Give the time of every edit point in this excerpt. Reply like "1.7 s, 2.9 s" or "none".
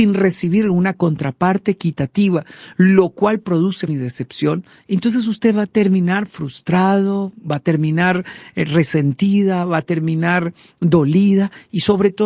3.9 s

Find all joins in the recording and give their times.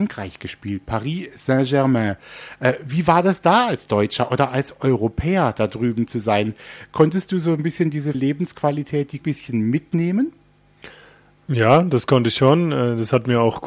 8.1 s, 9.2 s

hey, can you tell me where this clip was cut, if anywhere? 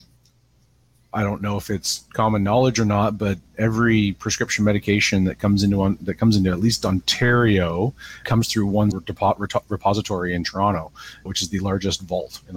8.2 s, 8.9 s, 11.3 s

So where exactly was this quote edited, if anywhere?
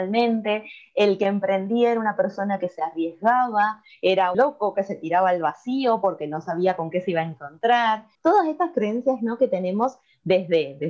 4.3 s, 8.1 s

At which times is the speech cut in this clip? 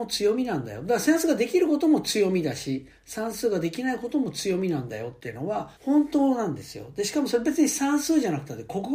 5.8 s

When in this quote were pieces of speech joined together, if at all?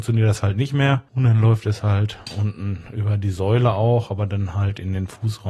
1.1 s

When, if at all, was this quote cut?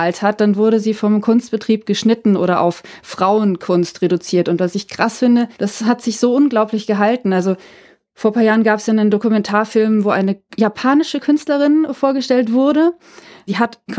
5.5 s

